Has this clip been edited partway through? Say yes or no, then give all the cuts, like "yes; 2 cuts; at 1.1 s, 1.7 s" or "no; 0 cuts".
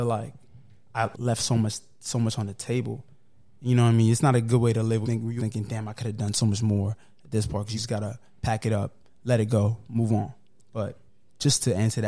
yes; 4 cuts; at 1.1 s, 5.0 s, 5.4 s, 7.8 s